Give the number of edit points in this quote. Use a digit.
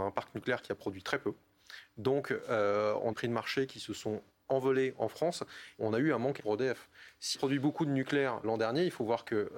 6